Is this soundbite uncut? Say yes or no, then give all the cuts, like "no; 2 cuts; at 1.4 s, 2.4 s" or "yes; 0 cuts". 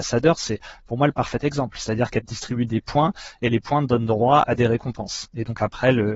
yes; 0 cuts